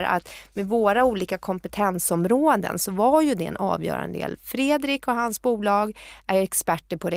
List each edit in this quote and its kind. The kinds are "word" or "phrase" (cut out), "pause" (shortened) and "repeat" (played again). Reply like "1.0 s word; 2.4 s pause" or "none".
none